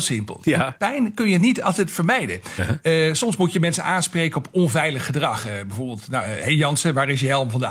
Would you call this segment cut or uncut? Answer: uncut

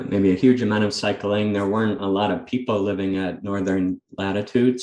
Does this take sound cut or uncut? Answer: uncut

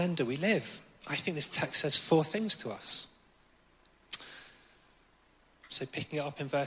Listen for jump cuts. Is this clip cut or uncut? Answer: uncut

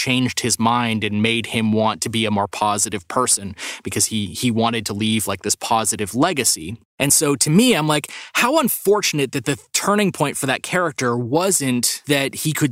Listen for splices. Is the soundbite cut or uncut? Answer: uncut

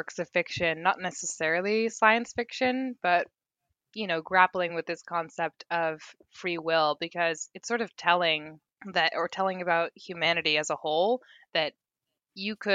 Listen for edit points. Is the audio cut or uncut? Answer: uncut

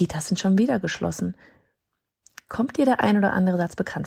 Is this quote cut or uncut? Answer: uncut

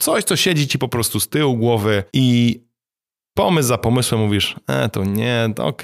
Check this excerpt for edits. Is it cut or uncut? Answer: cut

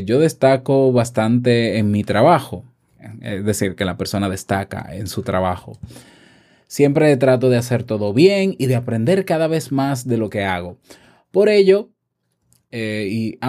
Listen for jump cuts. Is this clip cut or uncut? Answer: uncut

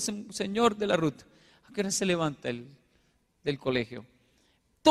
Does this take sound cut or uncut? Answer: uncut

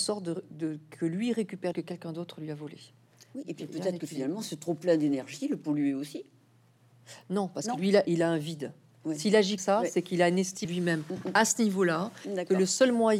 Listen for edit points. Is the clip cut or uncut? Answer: cut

